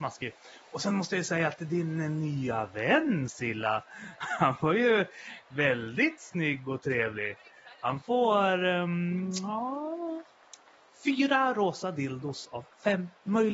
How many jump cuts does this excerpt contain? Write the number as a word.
zero